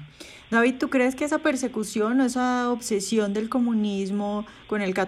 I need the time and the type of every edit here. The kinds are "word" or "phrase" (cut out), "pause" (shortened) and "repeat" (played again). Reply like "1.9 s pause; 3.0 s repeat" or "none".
none